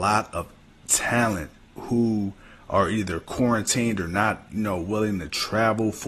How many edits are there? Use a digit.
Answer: 0